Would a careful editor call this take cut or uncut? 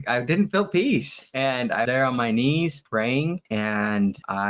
cut